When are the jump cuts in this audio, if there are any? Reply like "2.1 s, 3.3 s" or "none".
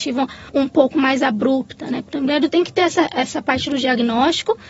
2.5 s